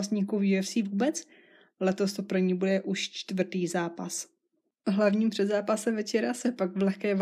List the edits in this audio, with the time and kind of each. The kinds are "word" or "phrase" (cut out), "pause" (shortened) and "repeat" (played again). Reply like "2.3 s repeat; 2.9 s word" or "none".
none